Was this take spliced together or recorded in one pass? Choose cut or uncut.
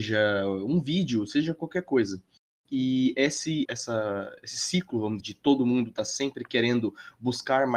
cut